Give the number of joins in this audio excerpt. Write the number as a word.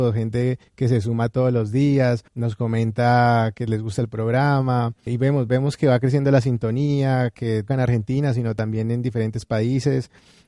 three